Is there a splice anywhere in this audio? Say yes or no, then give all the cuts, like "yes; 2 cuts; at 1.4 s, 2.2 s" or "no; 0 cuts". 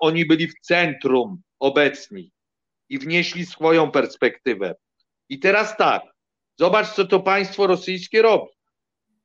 no; 0 cuts